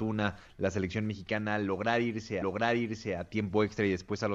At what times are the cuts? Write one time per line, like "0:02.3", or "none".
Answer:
0:02.4